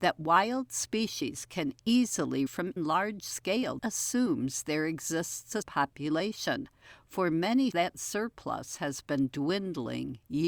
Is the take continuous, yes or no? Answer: no